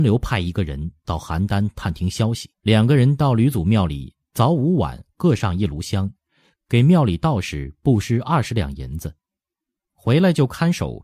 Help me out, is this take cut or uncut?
cut